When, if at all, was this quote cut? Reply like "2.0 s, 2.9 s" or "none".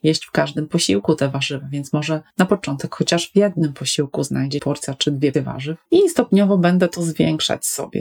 2.3 s, 4.6 s, 5.3 s, 5.9 s

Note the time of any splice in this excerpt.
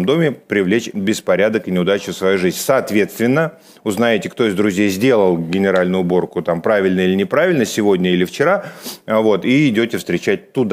none

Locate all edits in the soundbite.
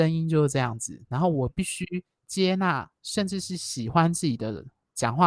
2.1 s

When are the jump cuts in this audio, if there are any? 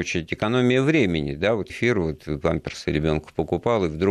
1.7 s

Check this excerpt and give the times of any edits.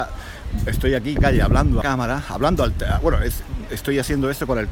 1.2 s, 1.8 s

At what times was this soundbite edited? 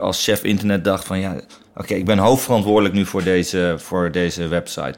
none

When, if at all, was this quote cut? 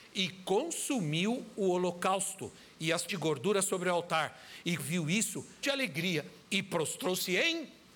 3.1 s, 4.8 s, 5.6 s, 6.4 s

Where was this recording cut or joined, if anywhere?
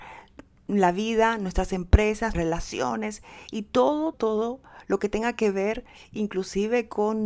2.3 s, 4.1 s

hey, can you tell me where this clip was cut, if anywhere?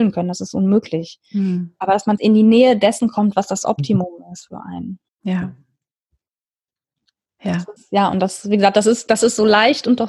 2.2 s, 5.1 s, 7.8 s

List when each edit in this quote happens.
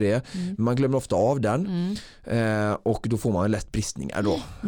none

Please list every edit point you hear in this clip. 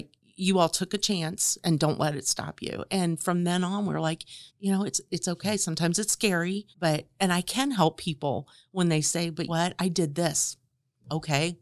4.5 s, 6.7 s, 9.5 s

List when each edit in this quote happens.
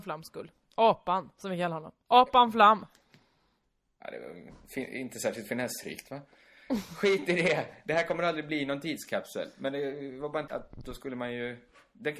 10.5 s

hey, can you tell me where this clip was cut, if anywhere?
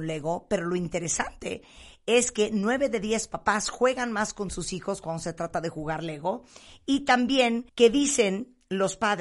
7.7 s

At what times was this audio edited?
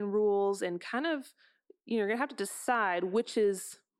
none

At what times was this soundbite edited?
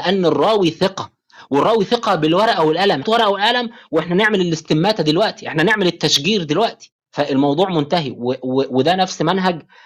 3.0 s

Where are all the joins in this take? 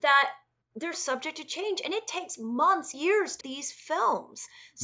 0.9 s, 2.9 s, 3.4 s

